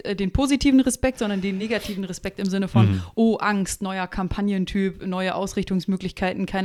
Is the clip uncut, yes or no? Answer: yes